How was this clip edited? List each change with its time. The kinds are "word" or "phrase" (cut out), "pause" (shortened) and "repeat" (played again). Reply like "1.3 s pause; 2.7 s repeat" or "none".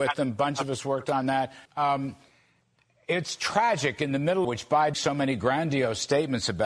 1.7 s pause; 4.4 s phrase; 4.9 s phrase